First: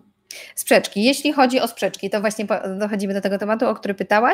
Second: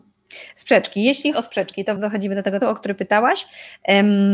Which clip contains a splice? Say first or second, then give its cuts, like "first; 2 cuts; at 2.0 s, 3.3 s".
second; 3 cuts; at 1.3 s, 2.0 s, 2.6 s